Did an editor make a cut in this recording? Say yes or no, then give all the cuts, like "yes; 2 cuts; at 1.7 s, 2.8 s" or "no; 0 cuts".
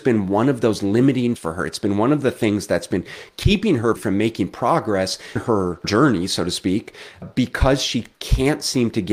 yes; 5 cuts; at 1.4 s, 4.0 s, 5.4 s, 7.2 s, 8.1 s